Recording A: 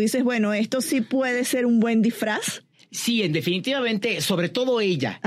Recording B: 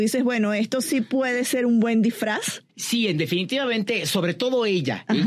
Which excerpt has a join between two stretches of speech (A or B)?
B